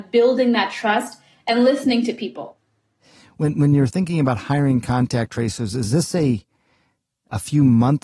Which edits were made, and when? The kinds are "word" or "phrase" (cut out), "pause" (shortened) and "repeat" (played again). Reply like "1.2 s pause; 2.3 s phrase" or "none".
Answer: none